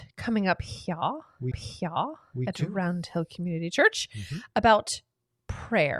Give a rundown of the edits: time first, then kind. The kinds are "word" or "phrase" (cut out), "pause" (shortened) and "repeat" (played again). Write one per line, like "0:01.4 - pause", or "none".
0:01.5 - repeat